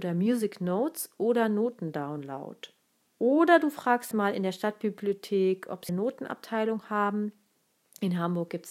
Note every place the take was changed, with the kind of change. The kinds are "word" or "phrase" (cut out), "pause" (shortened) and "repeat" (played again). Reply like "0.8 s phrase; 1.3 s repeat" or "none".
4.1 s word; 5.9 s word